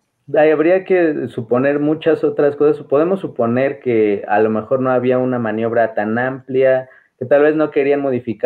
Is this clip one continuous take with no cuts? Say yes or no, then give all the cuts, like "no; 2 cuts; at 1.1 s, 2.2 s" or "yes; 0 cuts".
yes; 0 cuts